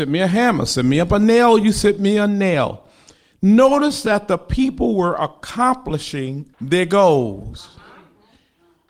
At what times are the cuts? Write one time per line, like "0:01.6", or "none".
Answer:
0:06.5